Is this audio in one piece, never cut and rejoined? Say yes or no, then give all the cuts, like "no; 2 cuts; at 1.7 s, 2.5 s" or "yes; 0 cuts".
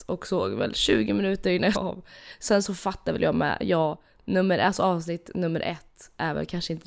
no; 1 cut; at 1.7 s